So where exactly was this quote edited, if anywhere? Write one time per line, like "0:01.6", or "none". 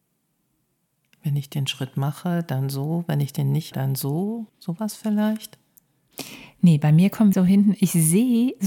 0:03.7
0:04.5
0:07.3